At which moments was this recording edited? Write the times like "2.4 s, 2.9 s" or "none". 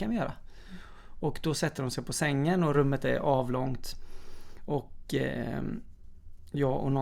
none